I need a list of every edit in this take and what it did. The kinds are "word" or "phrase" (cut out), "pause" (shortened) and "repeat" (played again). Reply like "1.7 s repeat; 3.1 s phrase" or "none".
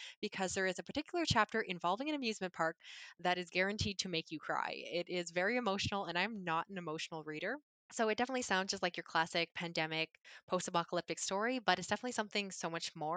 none